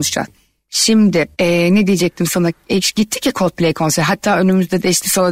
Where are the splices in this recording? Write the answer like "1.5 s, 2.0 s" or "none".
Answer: 1.3 s